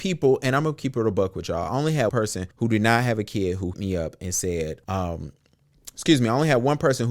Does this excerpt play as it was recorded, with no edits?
no; 4 cuts; at 2.1 s, 2.5 s, 3.7 s, 4.8 s

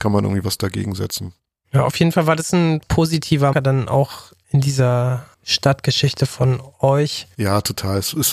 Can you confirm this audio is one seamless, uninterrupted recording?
no; 2 cuts; at 2.8 s, 3.5 s

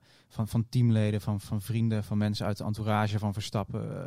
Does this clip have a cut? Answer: no; 0 cuts

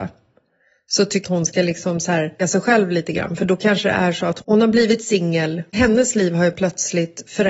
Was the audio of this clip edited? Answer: yes; 3 cuts; at 1.2 s, 2.4 s, 5.7 s

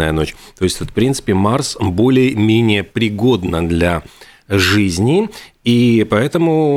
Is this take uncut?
yes; 0 cuts

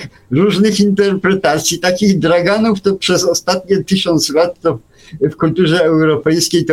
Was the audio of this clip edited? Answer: no; 0 cuts

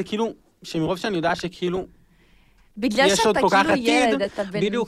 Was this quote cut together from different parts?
no; 0 cuts

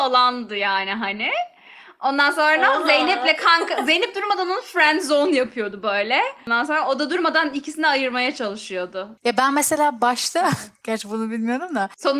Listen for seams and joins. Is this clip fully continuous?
yes; 0 cuts

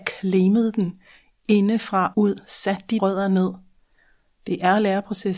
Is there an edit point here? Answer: yes; 2 cuts; at 2.1 s, 3.0 s

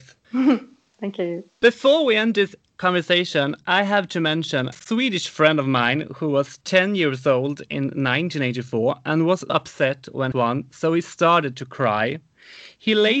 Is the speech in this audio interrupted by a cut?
yes; 4 cuts; at 1.5 s, 4.7 s, 9.5 s, 10.3 s

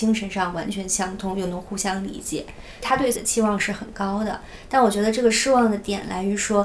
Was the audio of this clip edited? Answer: yes; 1 cut; at 3.1 s

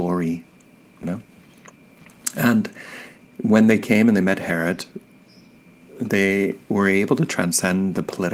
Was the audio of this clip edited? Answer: yes; 1 cut; at 1.0 s

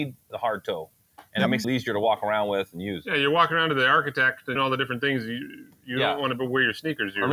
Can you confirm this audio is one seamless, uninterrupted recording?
no; 2 cuts; at 1.6 s, 4.6 s

